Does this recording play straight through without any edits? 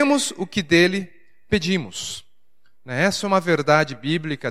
yes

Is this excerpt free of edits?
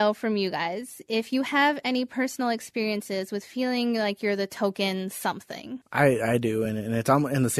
yes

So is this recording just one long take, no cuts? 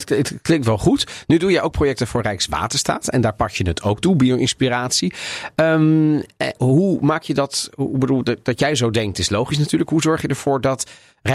no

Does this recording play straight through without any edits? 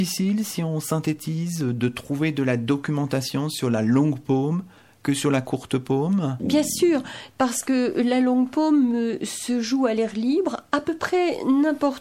yes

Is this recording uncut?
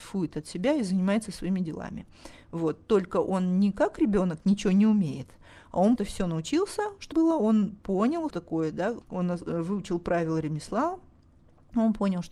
no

